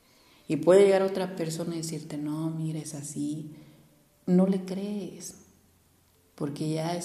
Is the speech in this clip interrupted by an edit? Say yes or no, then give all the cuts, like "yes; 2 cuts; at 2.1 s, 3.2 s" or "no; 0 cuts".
no; 0 cuts